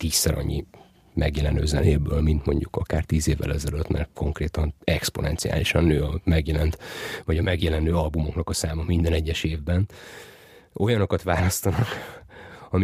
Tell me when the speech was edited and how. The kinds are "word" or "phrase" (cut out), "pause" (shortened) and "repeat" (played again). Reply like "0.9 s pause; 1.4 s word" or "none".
none